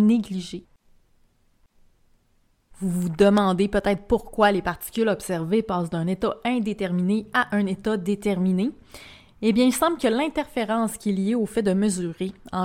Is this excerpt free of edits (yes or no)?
yes